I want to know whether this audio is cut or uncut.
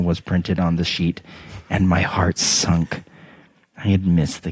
uncut